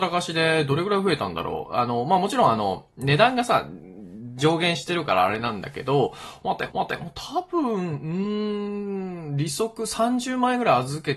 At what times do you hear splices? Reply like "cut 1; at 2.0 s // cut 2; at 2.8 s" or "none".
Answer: cut 1; at 6.7 s